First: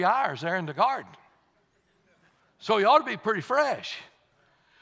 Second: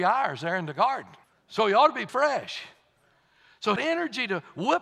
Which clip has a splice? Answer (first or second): second